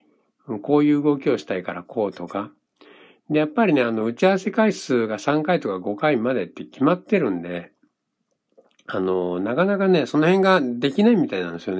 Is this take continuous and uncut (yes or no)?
yes